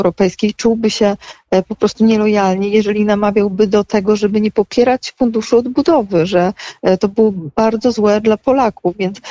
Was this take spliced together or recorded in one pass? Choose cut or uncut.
uncut